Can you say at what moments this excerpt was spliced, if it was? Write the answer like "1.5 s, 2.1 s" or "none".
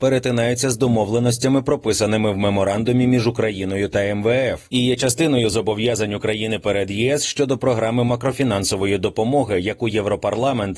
none